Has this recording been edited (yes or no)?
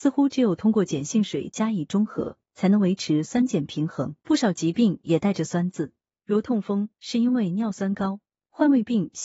yes